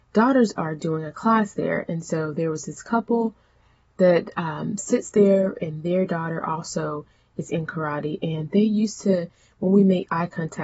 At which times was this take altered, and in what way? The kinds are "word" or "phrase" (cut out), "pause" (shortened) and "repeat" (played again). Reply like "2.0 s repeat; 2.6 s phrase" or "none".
none

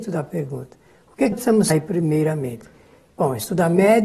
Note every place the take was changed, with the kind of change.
1.3 s word; 1.7 s word

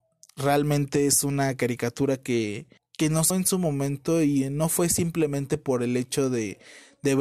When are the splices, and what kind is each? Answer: 2.8 s pause; 3.3 s word

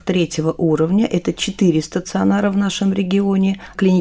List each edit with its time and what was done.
none

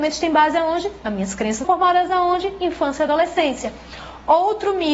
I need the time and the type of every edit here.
1.6 s phrase

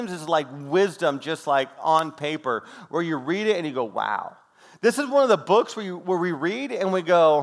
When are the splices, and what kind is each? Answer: none

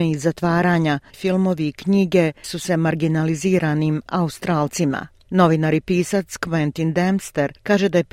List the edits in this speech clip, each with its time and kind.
1.1 s word; 2.4 s word; 4.1 s word

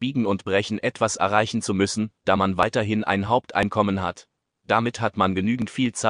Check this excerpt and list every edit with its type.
none

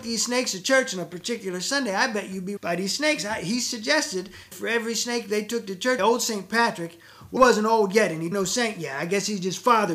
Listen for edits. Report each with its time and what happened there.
2.6 s word; 4.5 s word; 6.0 s phrase; 7.4 s word; 8.3 s word

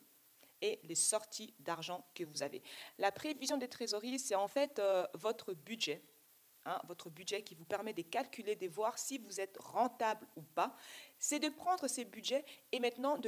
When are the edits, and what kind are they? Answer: none

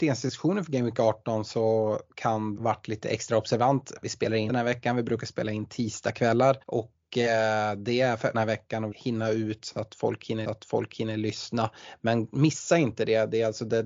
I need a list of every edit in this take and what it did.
2.6 s phrase; 4.0 s word; 4.5 s phrase; 6.6 s pause; 8.3 s phrase; 8.9 s word; 10.4 s repeat

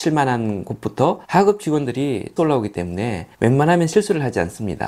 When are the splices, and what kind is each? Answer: 1.2 s pause; 2.4 s word; 3.3 s pause

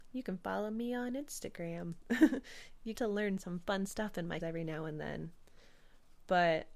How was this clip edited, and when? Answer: 2.9 s word; 4.4 s word

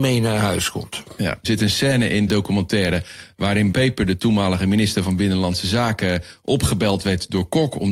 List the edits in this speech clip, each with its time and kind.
1.4 s word; 2.3 s word; 3.7 s word

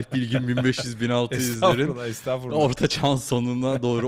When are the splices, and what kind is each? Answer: none

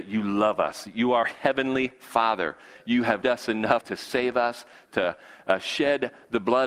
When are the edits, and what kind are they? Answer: 1.2 s word; 3.2 s word; 3.8 s word; 4.9 s word

